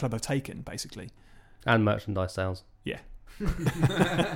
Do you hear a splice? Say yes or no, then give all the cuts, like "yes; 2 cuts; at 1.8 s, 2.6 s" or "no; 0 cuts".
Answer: no; 0 cuts